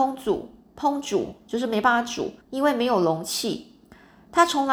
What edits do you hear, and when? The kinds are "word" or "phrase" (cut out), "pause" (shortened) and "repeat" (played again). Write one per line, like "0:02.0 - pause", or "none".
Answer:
0:02.4 - pause